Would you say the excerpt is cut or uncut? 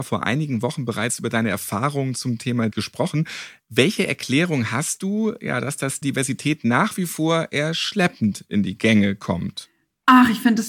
cut